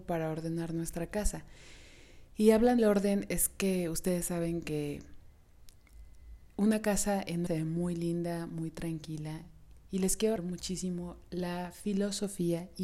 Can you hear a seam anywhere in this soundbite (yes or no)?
yes